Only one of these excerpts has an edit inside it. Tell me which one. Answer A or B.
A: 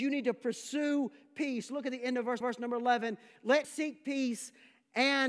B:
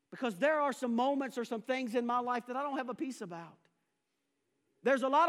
A